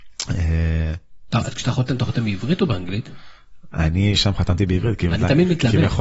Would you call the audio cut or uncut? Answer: uncut